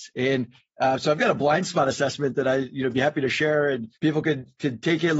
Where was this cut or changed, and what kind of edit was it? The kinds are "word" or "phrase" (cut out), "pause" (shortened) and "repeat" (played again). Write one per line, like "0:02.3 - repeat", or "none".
0:04.0 - pause